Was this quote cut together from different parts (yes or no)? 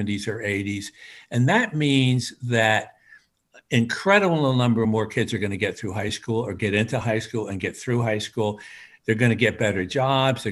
no